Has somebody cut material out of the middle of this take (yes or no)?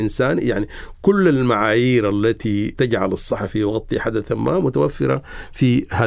no